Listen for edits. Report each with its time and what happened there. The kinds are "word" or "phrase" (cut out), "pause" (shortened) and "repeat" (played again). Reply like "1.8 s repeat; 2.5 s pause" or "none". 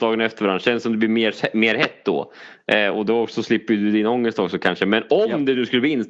none

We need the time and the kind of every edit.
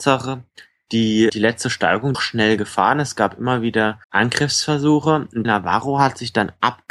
1.3 s word; 2.1 s phrase; 4.0 s pause; 5.4 s word

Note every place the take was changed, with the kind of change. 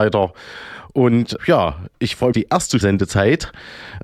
1.4 s word; 2.3 s phrase; 2.8 s word

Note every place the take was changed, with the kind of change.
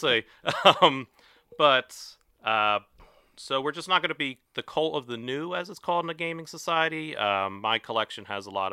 4.5 s pause

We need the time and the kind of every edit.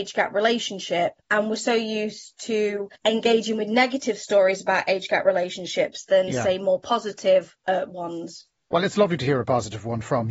1.2 s pause; 2.9 s pause; 7.6 s pause

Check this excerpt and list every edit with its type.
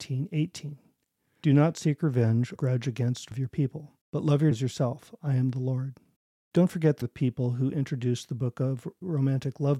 2.5 s phrase; 3.3 s word; 4.0 s pause; 4.5 s word; 6.2 s pause; 7.0 s phrase

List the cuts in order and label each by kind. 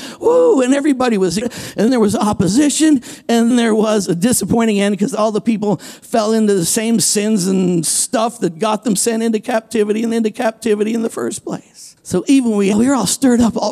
1.4 s phrase; 1.9 s word; 3.5 s word; 10.1 s repeat; 12.0 s pause; 12.7 s word

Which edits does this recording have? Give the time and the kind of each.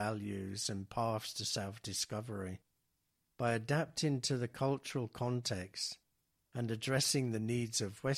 none

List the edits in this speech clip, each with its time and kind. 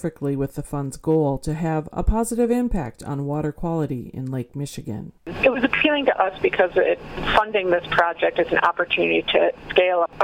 5.2 s pause

